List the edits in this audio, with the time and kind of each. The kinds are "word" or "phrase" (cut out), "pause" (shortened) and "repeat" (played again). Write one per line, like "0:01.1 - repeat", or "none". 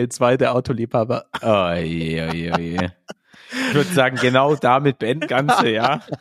0:03.7 - phrase
0:05.3 - phrase